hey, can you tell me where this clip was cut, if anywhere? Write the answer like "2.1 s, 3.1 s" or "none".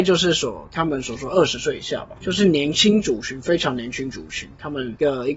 2.2 s